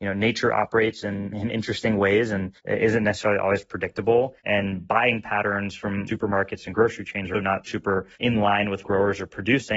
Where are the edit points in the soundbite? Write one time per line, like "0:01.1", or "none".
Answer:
0:01.3
0:02.6
0:04.4
0:06.1
0:07.3
0:07.6
0:08.1
0:08.8